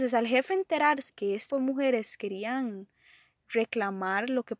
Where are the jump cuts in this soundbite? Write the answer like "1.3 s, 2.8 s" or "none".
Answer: 1.1 s, 1.5 s